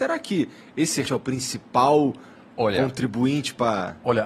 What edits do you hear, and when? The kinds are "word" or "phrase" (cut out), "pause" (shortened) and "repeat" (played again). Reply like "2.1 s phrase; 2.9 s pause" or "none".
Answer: 1.1 s word